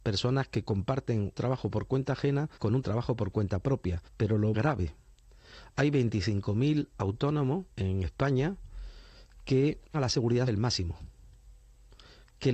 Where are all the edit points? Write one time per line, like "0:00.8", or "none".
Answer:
0:01.3
0:02.6
0:04.1
0:04.5
0:07.7
0:09.9
0:10.5